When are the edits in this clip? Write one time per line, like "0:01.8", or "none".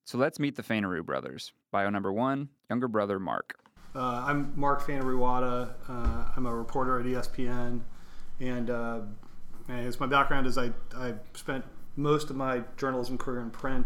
0:01.6
0:02.6

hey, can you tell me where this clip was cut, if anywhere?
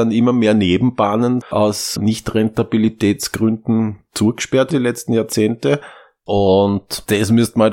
0:01.4
0:02.0
0:04.7

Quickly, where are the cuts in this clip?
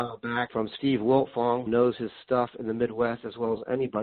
0:01.7

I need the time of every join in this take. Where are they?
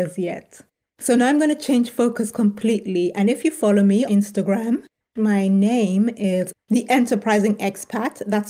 0:04.1

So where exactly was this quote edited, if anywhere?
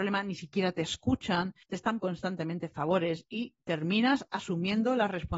0:01.6
0:02.0

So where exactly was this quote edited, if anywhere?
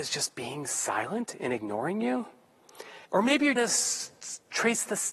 0:03.0
0:03.6

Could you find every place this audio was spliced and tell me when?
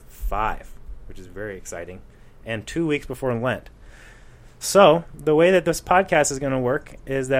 none

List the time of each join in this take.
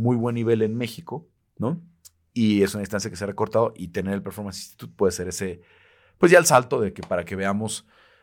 none

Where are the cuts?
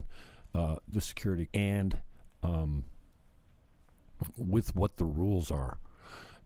0:00.9
0:01.5

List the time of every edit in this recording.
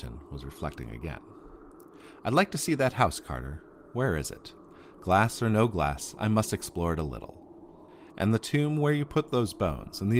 none

